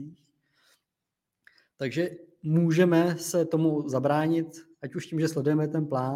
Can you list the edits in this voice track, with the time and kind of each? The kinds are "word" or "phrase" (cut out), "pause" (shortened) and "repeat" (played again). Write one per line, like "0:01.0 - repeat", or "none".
0:04.7 - pause

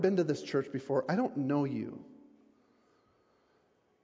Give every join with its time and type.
none

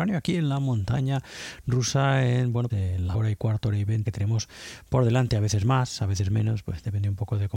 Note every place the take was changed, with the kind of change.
0:02.7 - word
0:03.1 - word
0:04.0 - phrase

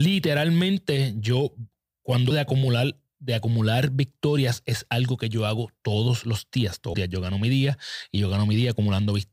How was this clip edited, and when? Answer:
0:02.3 - word
0:06.9 - word

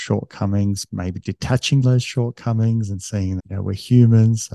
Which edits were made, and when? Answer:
0:01.8 - word
0:03.4 - word

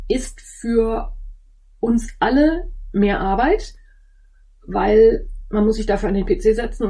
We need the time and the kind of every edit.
none

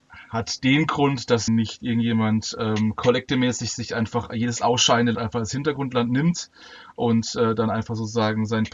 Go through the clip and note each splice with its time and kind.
0:01.5 - word
0:05.1 - word

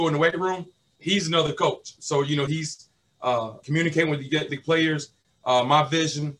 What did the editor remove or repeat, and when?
0:00.9 - word
0:02.5 - phrase
0:03.6 - word
0:04.5 - word

